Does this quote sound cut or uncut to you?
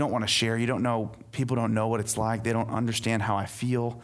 uncut